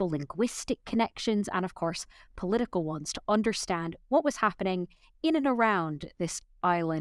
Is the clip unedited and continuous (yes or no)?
yes